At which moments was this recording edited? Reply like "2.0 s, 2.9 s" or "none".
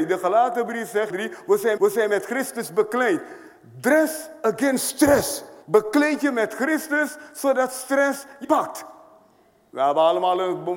1.1 s, 1.8 s, 5.6 s, 8.4 s